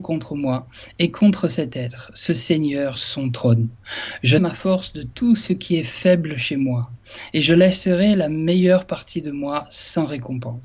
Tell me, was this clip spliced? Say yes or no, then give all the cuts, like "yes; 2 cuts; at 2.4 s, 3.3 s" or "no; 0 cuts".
yes; 2 cuts; at 2.9 s, 4.4 s